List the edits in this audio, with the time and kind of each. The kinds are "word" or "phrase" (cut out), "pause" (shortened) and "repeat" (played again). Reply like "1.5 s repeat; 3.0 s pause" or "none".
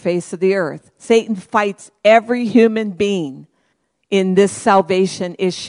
3.7 s pause